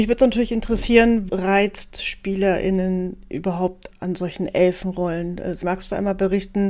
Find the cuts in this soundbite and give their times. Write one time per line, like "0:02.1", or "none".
0:01.3
0:03.9
0:05.6